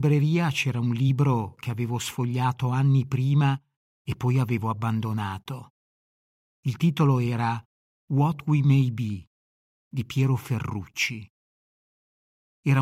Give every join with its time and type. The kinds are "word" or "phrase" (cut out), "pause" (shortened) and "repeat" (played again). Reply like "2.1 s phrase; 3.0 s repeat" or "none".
none